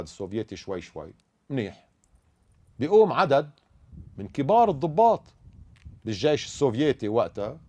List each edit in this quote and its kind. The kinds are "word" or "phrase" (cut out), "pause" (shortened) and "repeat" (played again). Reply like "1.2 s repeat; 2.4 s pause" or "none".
1.2 s pause; 6.0 s pause